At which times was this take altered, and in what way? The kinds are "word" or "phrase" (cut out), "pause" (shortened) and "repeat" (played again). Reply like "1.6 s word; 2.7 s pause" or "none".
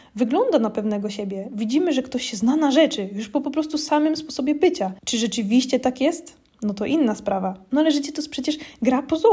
5.0 s pause